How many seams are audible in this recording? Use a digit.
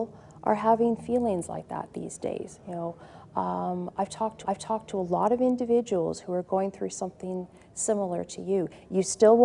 1